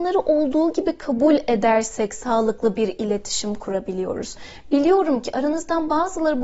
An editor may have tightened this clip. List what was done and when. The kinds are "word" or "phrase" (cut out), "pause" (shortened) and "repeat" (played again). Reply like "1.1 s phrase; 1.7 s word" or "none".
none